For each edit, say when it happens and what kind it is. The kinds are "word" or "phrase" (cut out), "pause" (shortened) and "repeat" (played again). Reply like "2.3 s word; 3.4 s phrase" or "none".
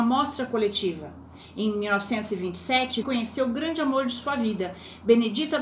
3.0 s word